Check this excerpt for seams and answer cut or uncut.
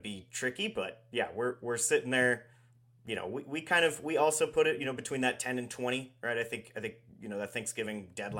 uncut